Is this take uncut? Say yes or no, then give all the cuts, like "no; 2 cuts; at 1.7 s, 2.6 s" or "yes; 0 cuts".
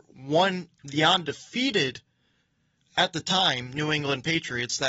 yes; 0 cuts